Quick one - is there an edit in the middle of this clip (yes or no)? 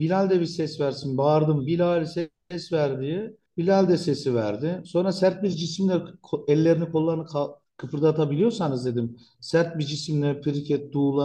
no